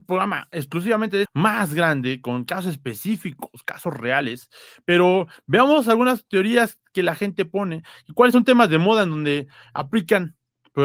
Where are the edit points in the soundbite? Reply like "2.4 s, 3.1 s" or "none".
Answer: 1.3 s